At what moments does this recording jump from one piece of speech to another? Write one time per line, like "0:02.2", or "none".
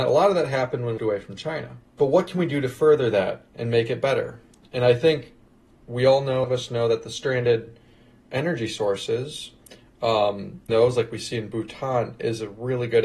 0:01.0
0:01.9
0:06.4
0:10.7